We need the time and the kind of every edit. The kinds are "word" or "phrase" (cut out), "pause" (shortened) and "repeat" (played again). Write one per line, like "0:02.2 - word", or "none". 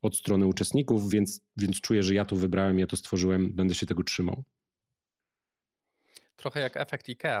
none

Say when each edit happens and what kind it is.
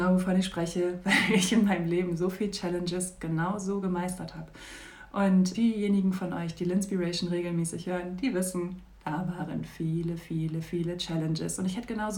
0:05.5 - word

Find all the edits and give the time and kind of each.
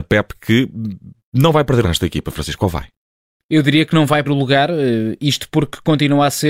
0:01.8 - word
0:04.2 - word

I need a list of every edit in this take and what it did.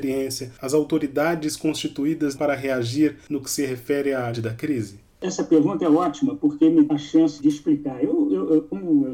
0:02.3 - word
0:04.3 - word
0:06.9 - word
0:07.4 - word

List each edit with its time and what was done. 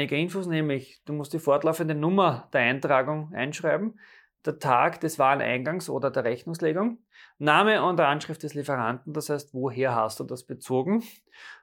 none

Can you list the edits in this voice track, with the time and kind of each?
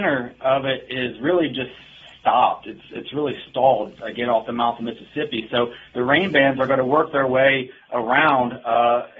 none

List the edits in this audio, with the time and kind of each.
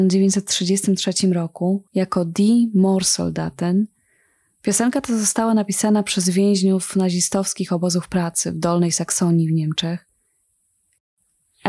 0:01.9 - pause

